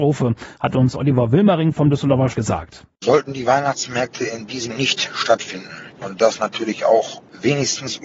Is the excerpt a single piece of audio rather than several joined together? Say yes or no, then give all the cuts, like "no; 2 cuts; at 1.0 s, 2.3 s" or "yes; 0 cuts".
no; 2 cuts; at 2.3 s, 4.7 s